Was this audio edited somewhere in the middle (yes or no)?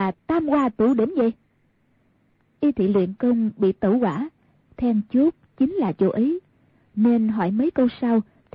no